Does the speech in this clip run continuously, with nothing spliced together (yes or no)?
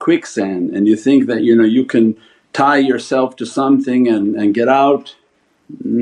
yes